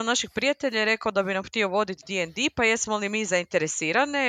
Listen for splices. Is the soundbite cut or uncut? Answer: uncut